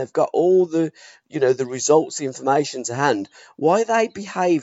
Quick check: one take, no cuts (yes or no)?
yes